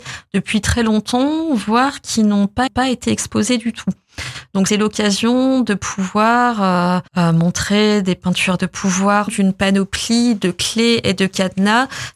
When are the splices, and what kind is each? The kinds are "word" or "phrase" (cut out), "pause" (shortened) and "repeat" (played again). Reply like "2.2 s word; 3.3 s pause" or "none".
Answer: 2.7 s repeat; 4.7 s word; 7.1 s pause; 8.6 s phrase; 9.3 s phrase